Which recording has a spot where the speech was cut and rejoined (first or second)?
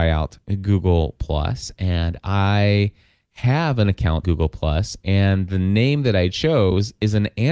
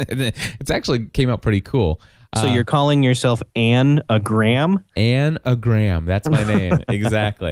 first